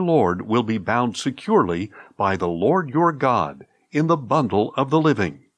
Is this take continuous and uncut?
yes; 0 cuts

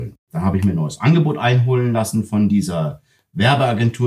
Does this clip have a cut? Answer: no; 0 cuts

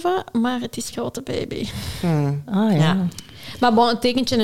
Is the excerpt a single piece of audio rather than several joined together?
no; 1 cut; at 0.9 s

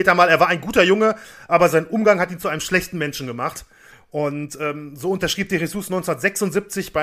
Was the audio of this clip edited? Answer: yes; 1 cut; at 3.9 s

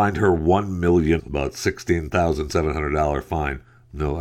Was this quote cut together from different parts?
yes; 1 cut; at 1.2 s

